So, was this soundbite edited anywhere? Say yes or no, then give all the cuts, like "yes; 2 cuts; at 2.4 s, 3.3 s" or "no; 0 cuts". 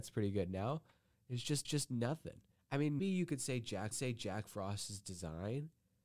yes; 3 cuts; at 1.6 s, 3.0 s, 3.9 s